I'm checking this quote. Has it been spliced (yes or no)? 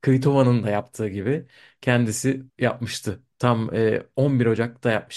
yes